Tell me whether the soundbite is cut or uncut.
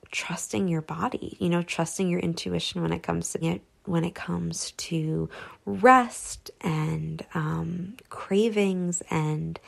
cut